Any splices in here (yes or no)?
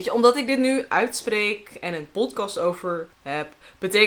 yes